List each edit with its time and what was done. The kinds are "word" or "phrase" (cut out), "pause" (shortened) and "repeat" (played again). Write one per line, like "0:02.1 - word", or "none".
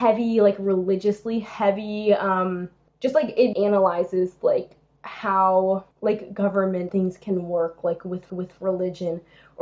0:02.9 - pause
0:03.5 - word
0:05.9 - pause
0:06.9 - word
0:08.3 - repeat